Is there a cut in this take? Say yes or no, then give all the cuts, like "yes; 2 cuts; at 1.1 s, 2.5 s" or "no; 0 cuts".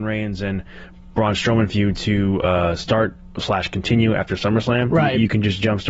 no; 0 cuts